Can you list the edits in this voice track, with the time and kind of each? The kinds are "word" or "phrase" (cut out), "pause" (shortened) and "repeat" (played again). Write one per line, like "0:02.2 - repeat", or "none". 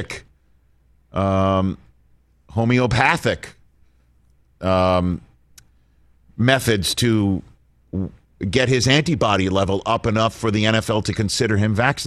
none